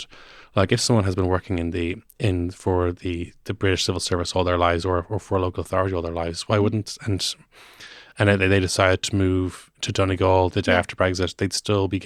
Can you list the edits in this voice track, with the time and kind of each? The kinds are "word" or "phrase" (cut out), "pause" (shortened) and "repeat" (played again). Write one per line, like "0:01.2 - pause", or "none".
none